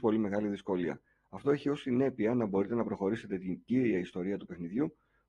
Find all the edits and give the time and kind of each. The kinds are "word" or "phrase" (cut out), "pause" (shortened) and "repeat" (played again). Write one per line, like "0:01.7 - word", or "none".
none

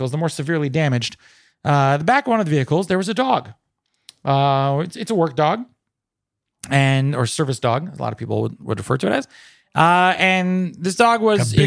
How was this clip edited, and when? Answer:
none

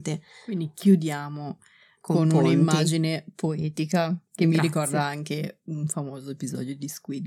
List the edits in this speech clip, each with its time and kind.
none

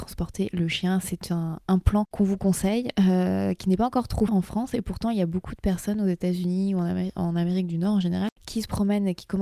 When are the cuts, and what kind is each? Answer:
0:04.3 - word

